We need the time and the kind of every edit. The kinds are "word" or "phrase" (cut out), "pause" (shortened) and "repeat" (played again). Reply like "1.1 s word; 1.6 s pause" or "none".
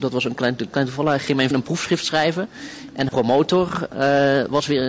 1.5 s word; 3.1 s word